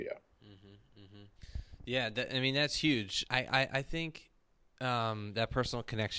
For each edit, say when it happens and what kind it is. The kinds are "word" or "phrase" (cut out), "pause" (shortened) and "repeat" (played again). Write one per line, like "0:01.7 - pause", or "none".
0:03.3 - phrase